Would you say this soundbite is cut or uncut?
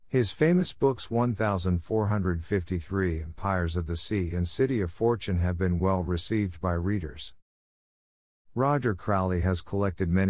uncut